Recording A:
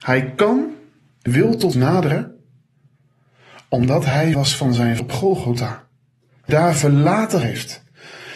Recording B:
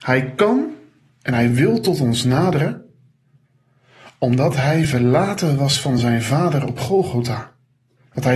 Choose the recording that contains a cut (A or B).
A